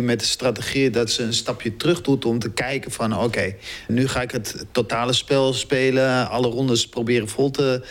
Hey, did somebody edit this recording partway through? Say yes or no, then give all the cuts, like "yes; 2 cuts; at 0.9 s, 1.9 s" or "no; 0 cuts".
yes; 1 cut; at 3.9 s